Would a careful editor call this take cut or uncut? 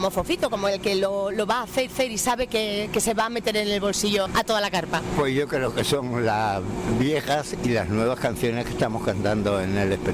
cut